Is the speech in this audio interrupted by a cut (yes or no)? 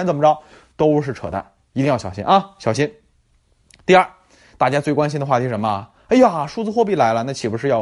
no